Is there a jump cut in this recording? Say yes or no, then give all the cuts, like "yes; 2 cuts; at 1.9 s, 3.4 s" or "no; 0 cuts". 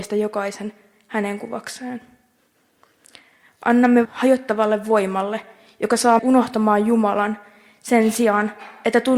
yes; 2 cuts; at 4.0 s, 6.2 s